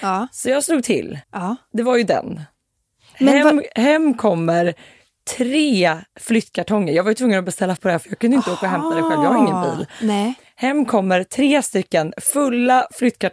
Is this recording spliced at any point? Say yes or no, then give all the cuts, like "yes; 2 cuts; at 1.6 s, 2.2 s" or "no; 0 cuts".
yes; 3 cuts; at 1.2 s, 6.1 s, 7.8 s